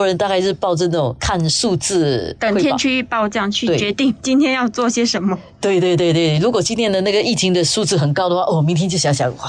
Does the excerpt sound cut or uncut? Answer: uncut